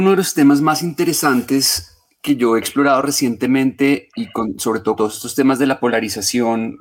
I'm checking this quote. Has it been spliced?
yes; 2 cuts; at 4.2 s, 5.0 s

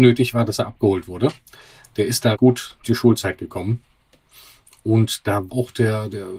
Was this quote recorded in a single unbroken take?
no; 3 cuts; at 2.4 s, 2.8 s, 5.5 s

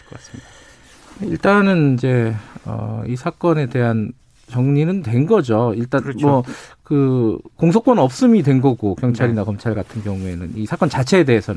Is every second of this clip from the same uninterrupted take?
yes; 0 cuts

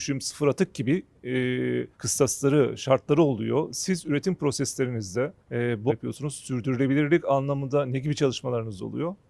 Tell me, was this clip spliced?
yes; 3 cuts; at 1.9 s, 5.4 s, 5.9 s

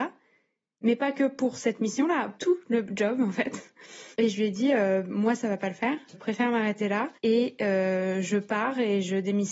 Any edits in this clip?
yes; 4 cuts; at 2.4 s, 4.1 s, 6.1 s, 7.2 s

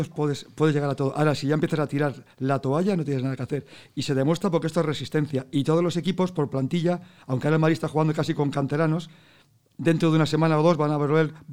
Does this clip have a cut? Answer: no; 0 cuts

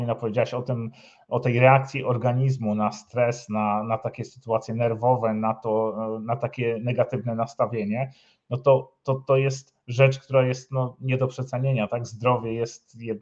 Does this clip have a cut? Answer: no; 0 cuts

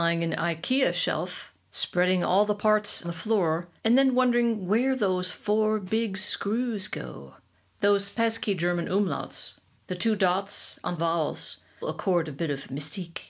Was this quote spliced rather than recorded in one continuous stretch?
yes; 6 cuts; at 1.7 s, 3.0 s, 3.8 s, 7.5 s, 11.0 s, 11.8 s

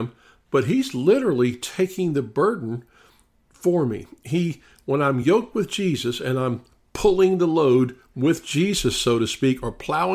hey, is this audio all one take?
yes; 0 cuts

